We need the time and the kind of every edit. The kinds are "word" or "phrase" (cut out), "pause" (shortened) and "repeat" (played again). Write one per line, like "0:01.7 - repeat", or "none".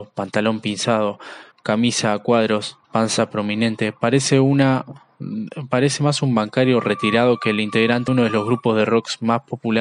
0:01.5 - pause
0:02.8 - pause
0:08.1 - word